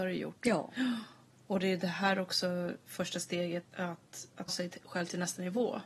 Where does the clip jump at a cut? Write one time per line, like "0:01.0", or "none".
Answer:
0:03.6
0:04.5